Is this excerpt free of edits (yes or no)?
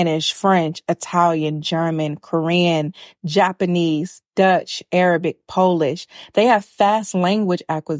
yes